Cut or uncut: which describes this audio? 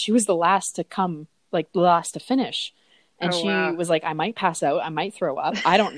uncut